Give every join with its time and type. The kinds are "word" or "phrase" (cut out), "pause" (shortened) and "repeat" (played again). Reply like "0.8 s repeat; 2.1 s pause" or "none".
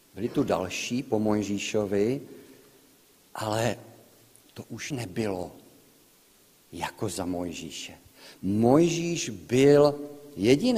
4.9 s word